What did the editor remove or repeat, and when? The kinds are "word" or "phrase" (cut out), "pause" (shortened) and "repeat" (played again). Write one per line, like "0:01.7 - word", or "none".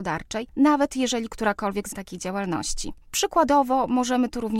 0:01.9 - phrase